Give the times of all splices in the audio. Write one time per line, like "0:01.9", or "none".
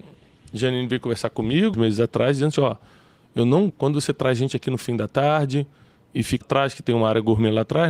0:01.7
0:02.5
0:03.7
0:06.4